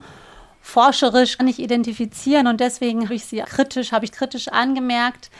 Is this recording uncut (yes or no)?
no